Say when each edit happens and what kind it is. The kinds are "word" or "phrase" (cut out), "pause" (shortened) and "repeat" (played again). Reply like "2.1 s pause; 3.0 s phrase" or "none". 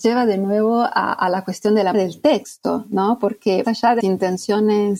1.9 s word; 3.6 s word; 4.0 s word